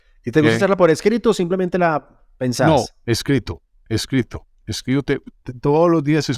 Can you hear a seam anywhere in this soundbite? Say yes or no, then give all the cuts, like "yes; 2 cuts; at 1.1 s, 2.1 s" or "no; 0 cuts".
no; 0 cuts